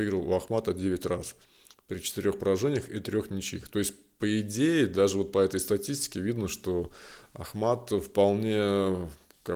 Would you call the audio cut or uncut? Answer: uncut